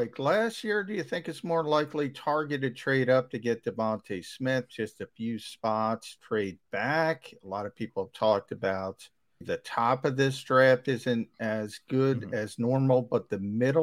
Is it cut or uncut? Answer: cut